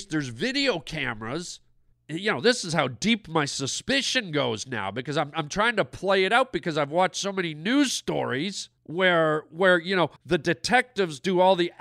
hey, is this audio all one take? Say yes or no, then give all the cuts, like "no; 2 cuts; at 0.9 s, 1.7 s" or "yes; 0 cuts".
no; 3 cuts; at 1.9 s, 8.8 s, 10.2 s